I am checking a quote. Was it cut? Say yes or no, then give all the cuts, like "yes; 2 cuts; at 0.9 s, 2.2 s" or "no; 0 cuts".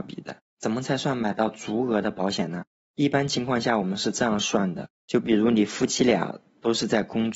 no; 0 cuts